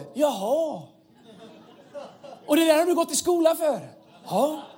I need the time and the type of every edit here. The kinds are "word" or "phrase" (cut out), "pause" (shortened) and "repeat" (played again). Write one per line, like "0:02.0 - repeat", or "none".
none